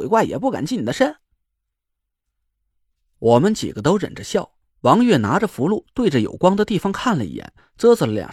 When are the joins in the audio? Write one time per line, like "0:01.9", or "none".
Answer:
none